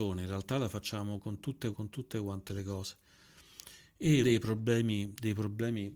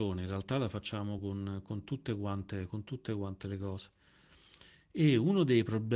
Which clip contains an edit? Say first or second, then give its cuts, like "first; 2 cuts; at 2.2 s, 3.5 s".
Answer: first; 3 cuts; at 1.2 s, 1.7 s, 4.2 s